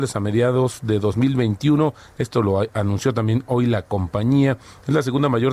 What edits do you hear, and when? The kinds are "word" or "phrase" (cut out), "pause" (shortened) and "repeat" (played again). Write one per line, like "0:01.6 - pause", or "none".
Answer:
none